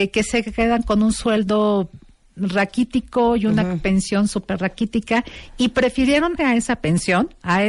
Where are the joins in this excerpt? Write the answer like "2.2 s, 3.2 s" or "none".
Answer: 6.4 s